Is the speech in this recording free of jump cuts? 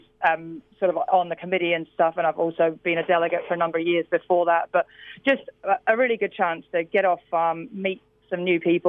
yes; 0 cuts

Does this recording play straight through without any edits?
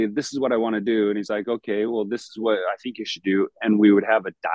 yes; 0 cuts

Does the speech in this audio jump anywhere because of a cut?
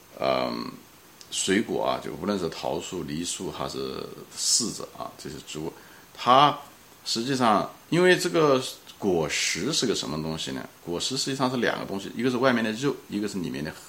yes; 1 cut; at 7.8 s

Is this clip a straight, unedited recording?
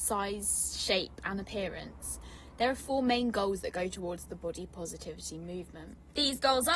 yes; 0 cuts

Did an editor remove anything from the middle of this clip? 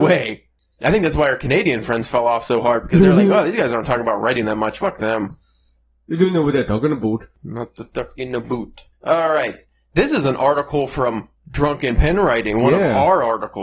yes; 1 cut; at 8.9 s

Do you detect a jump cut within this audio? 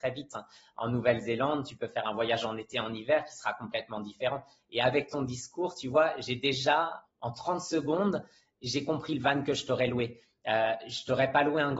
yes; 1 cut; at 7.0 s

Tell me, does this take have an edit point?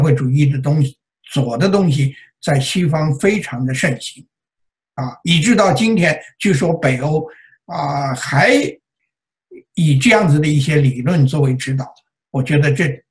no; 0 cuts

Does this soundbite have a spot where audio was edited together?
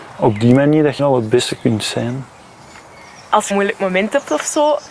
yes; 2 cuts; at 1.0 s, 3.5 s

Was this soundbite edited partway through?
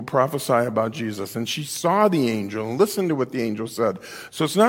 no; 0 cuts

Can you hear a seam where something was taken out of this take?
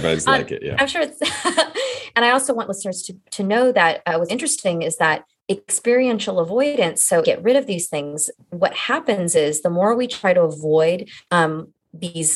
yes; 4 cuts; at 2.1 s, 4.3 s, 7.2 s, 11.2 s

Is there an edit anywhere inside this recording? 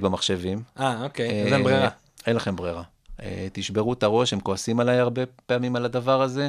no; 0 cuts

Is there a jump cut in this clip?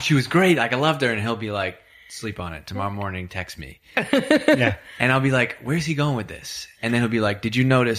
no; 0 cuts

